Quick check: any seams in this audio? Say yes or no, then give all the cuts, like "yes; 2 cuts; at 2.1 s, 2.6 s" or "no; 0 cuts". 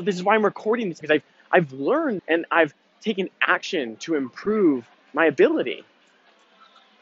yes; 3 cuts; at 1.0 s, 2.2 s, 4.9 s